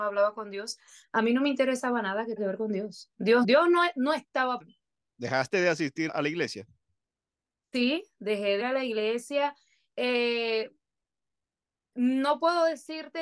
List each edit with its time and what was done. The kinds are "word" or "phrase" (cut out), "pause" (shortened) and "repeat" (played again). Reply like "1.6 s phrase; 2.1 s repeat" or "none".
2.4 s word; 3.4 s word; 4.6 s word; 6.1 s word; 8.6 s word